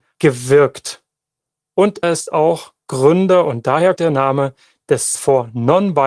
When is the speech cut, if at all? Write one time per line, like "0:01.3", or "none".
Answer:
0:02.0
0:04.0
0:05.1